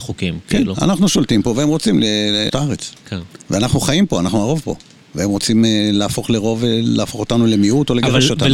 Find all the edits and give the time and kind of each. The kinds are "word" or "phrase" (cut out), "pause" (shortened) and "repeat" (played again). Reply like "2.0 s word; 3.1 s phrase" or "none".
2.5 s phrase